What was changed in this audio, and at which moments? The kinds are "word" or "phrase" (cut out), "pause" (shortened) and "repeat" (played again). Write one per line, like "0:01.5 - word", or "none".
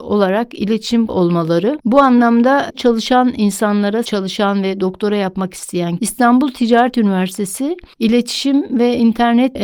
0:01.1 - word
0:02.7 - word
0:04.0 - word
0:06.0 - word